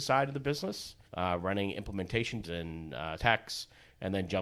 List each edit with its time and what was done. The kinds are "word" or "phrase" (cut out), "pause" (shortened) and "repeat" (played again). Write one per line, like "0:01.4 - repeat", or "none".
0:01.1 - pause
0:02.4 - word
0:03.2 - word